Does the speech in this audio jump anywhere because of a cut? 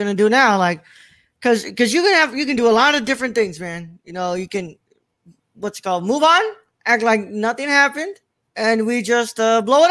no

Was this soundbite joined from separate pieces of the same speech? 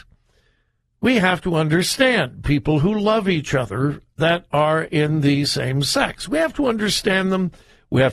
no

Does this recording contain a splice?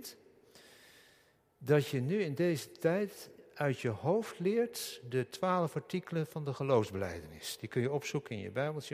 no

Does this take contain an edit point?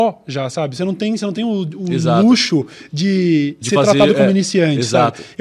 no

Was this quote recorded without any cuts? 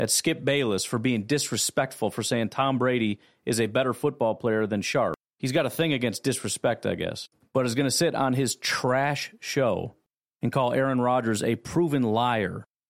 yes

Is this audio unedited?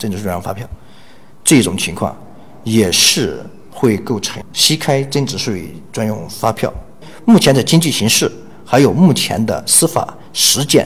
yes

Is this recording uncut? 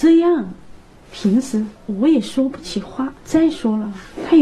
no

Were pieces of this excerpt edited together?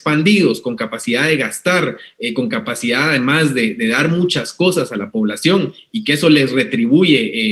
no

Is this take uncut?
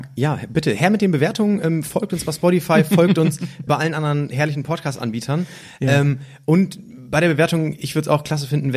no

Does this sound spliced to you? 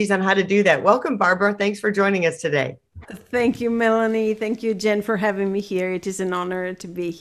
yes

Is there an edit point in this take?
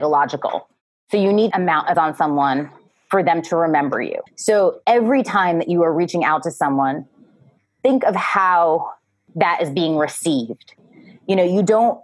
yes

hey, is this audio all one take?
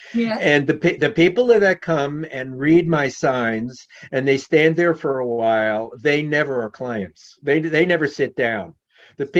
yes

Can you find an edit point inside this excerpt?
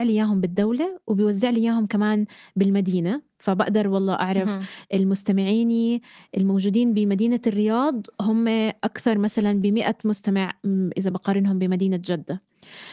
no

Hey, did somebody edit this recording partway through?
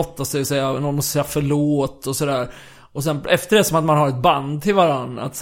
no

